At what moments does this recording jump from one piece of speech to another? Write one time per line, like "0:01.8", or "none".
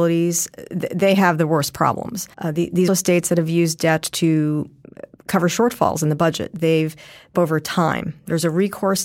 0:02.3
0:02.9
0:07.3